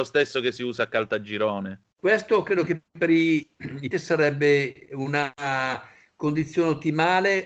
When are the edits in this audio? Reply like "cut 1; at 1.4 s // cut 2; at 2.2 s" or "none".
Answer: cut 1; at 1.9 s // cut 2; at 3.9 s